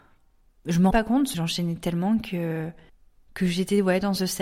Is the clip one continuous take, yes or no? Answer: no